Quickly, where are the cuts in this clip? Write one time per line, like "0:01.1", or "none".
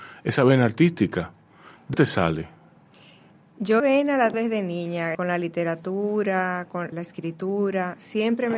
0:01.9
0:03.8
0:04.3
0:05.1
0:06.9